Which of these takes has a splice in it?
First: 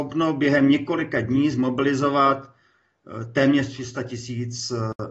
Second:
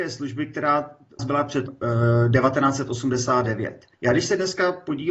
second; 3 cuts; at 1.2 s, 1.7 s, 3.9 s

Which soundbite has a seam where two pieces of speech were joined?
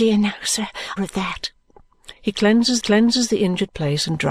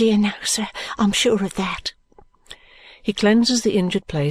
first; 3 cuts; at 1.0 s, 2.2 s, 2.8 s

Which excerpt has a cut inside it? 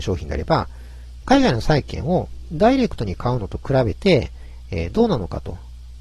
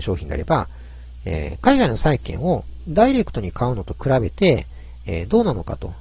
first; 1 cut; at 1.2 s

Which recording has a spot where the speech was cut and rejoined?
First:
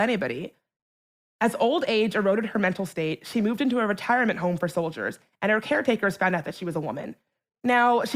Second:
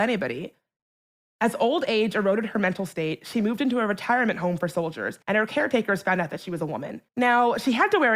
second; 2 cuts; at 5.2 s, 7.1 s

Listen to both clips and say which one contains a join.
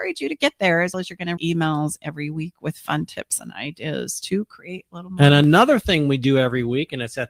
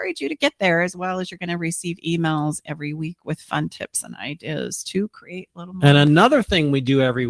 first; 2 cuts; at 0.9 s, 1.4 s

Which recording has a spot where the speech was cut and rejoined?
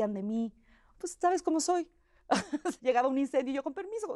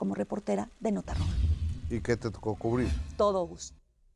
first; 1 cut; at 2.8 s

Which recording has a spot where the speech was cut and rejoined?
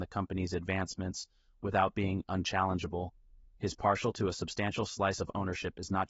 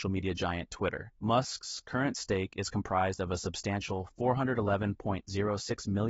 second; 1 cut; at 1.2 s

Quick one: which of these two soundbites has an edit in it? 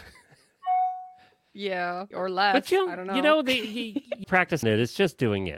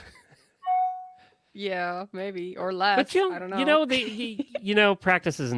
first; 3 cuts; at 2.1 s, 4.2 s, 4.6 s

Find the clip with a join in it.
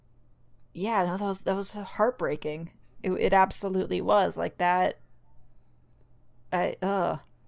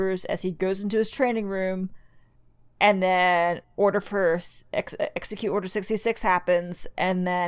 second; 2 cuts; at 2.4 s, 3.6 s

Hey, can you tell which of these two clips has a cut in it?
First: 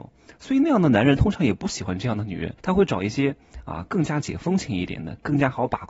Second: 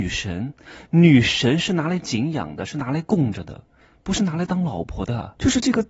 first; 1 cut; at 2.6 s

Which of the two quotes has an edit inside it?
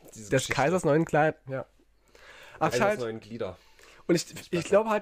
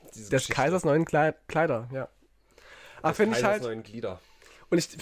first; 2 cuts; at 1.5 s, 2.7 s

